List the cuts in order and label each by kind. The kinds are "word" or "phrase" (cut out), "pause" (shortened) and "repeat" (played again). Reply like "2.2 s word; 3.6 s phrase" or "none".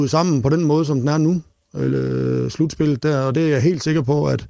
none